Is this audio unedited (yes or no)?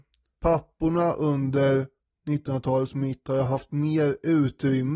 yes